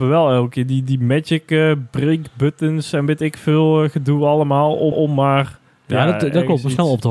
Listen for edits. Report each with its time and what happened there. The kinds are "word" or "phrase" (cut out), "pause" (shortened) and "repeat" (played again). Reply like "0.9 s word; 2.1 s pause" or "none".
4.9 s repeat